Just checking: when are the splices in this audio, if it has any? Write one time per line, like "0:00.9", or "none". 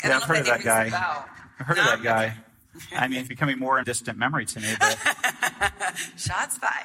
0:03.3
0:03.8